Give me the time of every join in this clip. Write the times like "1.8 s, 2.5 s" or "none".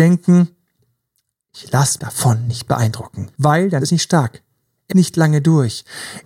2.0 s, 3.3 s, 3.8 s, 4.9 s

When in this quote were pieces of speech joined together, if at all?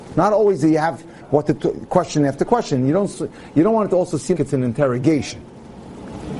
4.3 s

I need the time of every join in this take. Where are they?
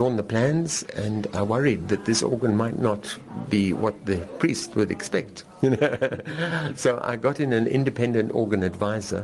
none

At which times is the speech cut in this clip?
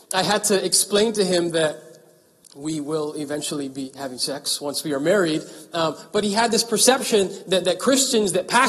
none

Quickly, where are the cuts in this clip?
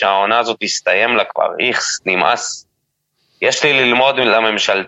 none

